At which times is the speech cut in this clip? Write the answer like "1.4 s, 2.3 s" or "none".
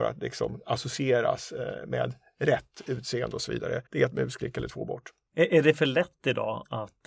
3.9 s